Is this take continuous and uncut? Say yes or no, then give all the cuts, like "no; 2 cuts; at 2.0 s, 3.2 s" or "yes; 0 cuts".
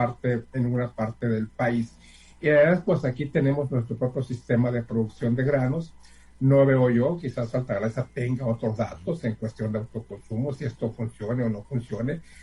yes; 0 cuts